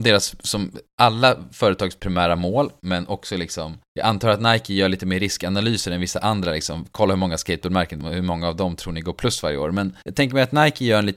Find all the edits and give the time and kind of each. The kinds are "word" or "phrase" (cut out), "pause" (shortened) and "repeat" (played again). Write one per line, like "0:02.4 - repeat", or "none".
0:10.0 - pause